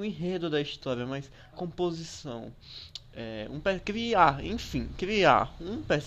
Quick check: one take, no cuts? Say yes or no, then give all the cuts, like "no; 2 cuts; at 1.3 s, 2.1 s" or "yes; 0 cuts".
no; 1 cut; at 1.5 s